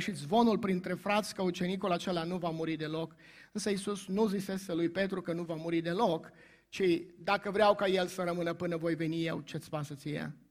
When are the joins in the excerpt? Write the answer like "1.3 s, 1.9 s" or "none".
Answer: none